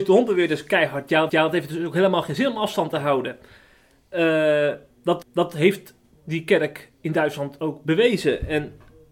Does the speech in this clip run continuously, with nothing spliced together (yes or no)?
no